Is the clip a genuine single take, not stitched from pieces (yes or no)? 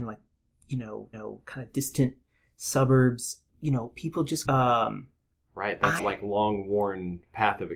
no